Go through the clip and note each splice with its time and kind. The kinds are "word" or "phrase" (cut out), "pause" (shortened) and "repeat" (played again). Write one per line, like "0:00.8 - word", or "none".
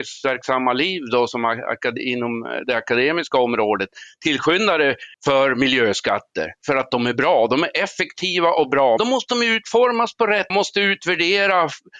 0:05.1 - pause
0:09.0 - word
0:10.5 - phrase